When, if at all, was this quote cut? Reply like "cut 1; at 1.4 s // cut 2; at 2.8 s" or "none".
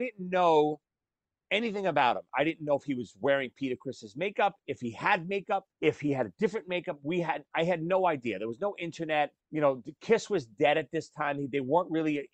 cut 1; at 5.7 s // cut 2; at 9.4 s